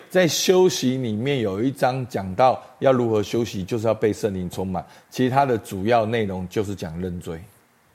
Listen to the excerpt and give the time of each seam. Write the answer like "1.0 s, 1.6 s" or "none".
none